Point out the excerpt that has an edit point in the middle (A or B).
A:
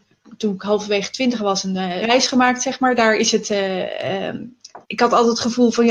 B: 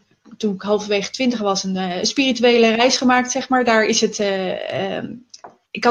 A